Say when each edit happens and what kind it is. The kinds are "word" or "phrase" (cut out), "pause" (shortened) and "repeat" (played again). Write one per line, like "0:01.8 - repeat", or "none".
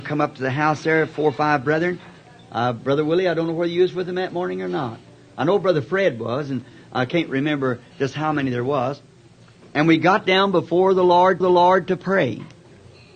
0:11.4 - repeat